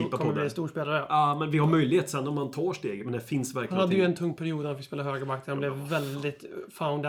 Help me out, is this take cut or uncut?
uncut